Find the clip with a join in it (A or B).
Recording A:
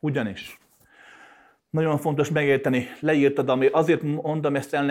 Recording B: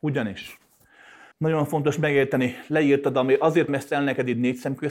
B